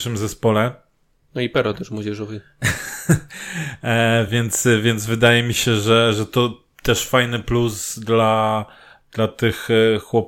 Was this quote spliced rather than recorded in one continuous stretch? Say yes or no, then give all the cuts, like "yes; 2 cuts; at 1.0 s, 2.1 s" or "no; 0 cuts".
no; 0 cuts